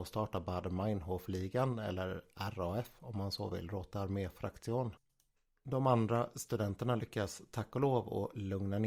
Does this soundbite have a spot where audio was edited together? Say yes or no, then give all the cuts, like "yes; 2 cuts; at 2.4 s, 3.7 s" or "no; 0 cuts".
no; 0 cuts